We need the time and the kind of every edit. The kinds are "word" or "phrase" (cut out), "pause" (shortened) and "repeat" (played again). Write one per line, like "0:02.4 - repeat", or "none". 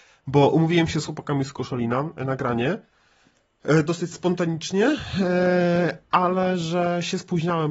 none